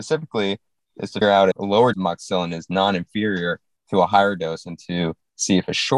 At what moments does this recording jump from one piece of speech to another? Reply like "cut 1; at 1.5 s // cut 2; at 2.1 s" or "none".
cut 1; at 1.2 s // cut 2; at 1.5 s // cut 3; at 1.9 s